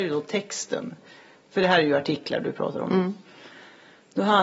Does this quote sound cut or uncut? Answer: uncut